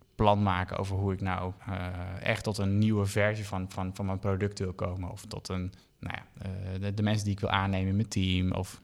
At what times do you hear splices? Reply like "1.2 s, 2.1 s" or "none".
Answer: 1.6 s, 3.7 s, 5.8 s